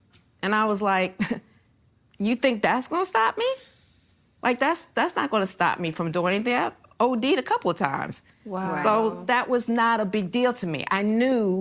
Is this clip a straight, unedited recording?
yes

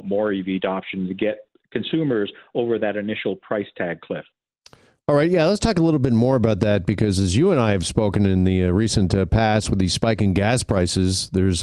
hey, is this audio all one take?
yes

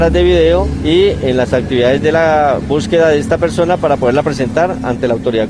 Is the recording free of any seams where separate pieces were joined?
yes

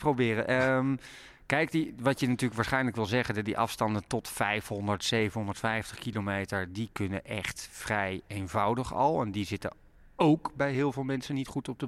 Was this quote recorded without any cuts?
yes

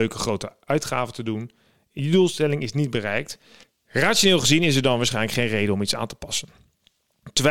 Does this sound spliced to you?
yes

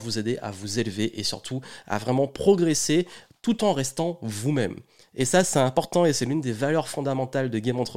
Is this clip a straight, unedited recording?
yes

